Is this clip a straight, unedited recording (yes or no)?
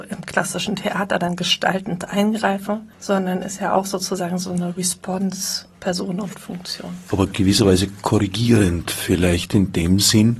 no